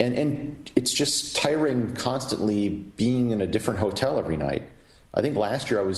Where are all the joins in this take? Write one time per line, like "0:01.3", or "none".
none